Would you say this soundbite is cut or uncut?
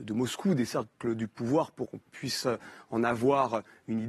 cut